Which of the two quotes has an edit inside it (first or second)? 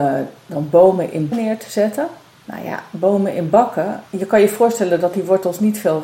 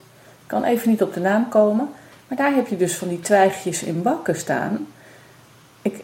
first